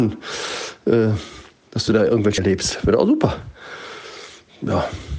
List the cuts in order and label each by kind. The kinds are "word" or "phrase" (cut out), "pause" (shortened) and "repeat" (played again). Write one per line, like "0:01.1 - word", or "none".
0:02.4 - word